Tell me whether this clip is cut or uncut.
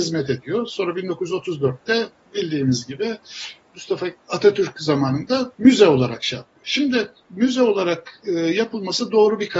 cut